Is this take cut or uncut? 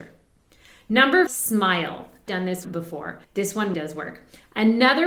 cut